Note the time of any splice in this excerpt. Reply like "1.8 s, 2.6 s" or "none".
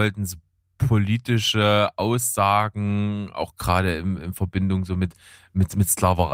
none

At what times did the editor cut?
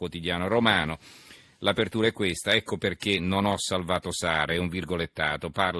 none

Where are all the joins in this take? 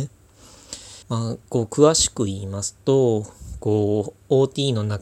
1.0 s

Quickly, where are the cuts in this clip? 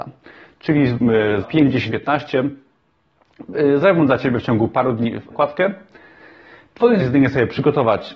1.4 s, 1.9 s, 5.3 s, 7.0 s

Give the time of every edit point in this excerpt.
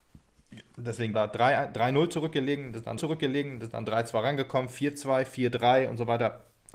1.1 s, 3.0 s

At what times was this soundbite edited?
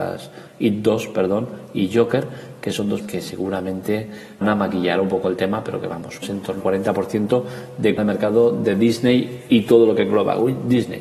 3.0 s, 4.4 s, 6.2 s, 6.6 s, 8.0 s

